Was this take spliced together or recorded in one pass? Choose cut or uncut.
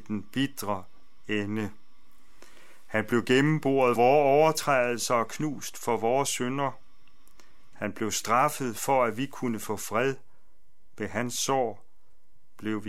cut